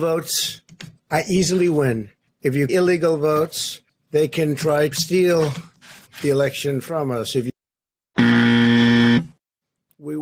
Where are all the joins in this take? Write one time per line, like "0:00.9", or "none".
0:01.0
0:02.3
0:02.7
0:03.9
0:04.9
0:06.1